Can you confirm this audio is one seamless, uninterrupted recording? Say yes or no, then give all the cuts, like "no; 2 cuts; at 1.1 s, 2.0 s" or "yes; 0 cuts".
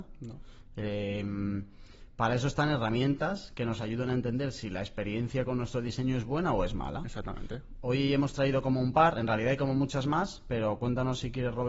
yes; 0 cuts